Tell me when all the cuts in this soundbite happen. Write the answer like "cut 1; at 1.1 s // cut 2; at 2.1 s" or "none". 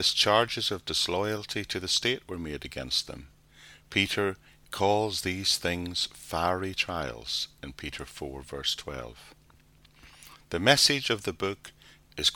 none